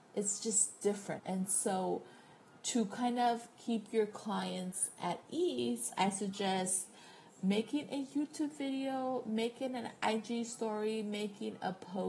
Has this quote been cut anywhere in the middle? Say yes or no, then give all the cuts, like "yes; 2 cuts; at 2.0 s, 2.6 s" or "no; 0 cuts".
yes; 1 cut; at 1.2 s